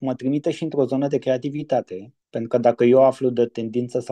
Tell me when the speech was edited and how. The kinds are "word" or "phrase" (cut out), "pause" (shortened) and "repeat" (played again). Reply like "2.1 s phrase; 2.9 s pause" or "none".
2.2 s pause